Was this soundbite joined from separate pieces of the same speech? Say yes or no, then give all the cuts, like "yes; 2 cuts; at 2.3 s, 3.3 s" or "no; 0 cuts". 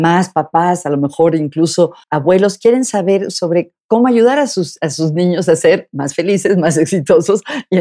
yes; 1 cut; at 2.0 s